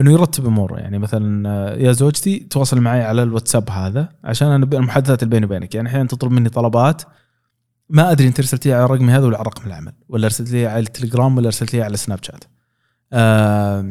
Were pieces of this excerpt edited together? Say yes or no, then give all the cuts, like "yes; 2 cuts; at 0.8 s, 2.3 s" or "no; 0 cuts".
no; 0 cuts